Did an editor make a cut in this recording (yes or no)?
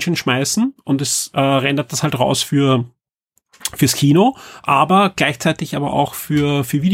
no